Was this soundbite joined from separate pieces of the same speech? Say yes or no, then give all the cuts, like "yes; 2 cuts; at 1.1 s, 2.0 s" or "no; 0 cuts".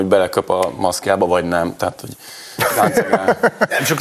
no; 0 cuts